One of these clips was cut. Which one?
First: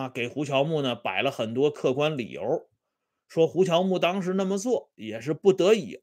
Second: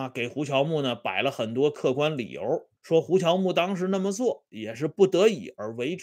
second; 1 cut; at 2.8 s

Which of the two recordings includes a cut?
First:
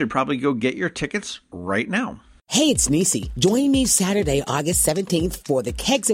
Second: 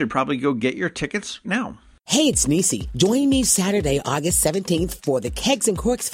second; 1 cut; at 1.4 s

